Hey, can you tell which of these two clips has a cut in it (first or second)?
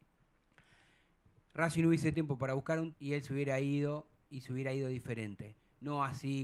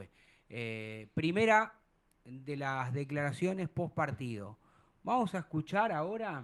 first